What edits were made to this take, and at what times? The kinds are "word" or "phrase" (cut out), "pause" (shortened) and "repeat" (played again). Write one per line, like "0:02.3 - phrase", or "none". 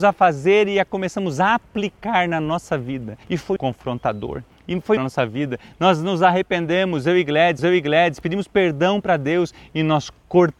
0:03.2 - pause
0:03.6 - word
0:04.5 - pause
0:05.0 - phrase
0:07.6 - repeat